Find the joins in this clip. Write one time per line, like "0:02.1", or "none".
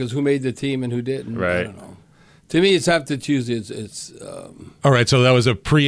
none